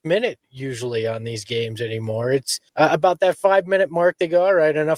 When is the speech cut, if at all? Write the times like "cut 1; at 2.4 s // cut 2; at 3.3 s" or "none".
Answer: cut 1; at 2.7 s